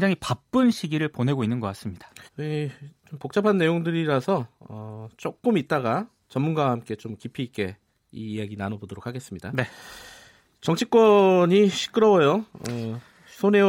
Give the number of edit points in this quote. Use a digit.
1